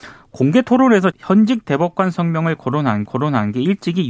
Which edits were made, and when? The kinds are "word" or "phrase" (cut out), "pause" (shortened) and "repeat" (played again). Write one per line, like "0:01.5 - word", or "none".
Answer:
0:01.1 - word
0:03.1 - repeat

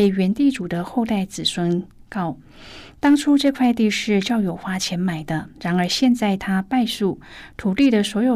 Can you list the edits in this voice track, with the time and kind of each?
0:05.5 - pause

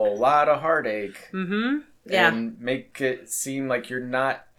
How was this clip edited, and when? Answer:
0:02.0 - pause

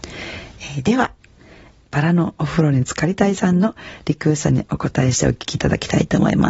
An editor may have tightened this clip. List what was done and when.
none

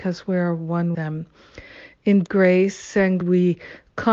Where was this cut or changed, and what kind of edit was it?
0:00.9 - word
0:02.3 - word
0:03.2 - word

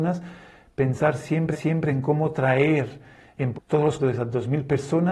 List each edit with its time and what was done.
0:01.5 - repeat
0:03.5 - word
0:04.0 - word

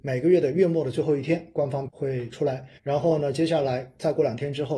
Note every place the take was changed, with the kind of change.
0:01.9 - word
0:02.8 - pause

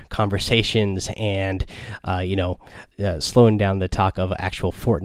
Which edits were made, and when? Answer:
0:02.9 - pause

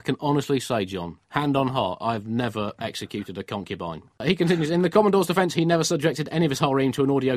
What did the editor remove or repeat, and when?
0:01.2 - pause

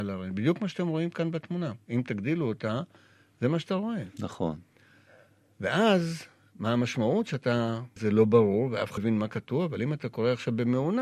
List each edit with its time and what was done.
0:08.0 - word
0:09.0 - word

